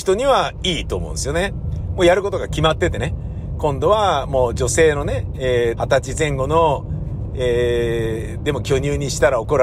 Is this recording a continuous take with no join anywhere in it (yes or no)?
no